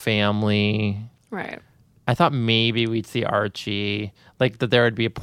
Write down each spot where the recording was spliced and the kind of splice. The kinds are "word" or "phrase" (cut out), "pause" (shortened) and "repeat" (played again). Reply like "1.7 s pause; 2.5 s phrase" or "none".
none